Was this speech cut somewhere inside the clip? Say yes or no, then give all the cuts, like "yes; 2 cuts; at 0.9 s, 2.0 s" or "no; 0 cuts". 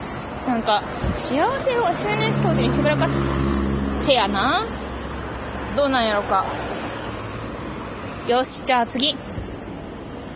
no; 0 cuts